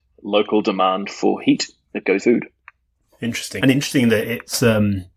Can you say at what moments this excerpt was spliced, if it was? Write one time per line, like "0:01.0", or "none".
0:02.2
0:03.6